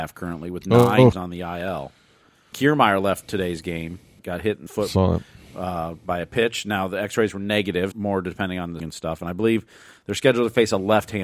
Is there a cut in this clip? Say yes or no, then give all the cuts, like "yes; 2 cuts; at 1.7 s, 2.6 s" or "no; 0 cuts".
yes; 6 cuts; at 1.1 s, 2.5 s, 4.2 s, 4.7 s, 7.9 s, 8.8 s